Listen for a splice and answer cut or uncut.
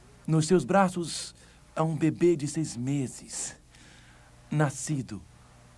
uncut